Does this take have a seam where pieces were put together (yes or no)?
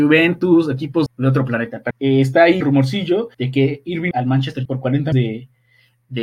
yes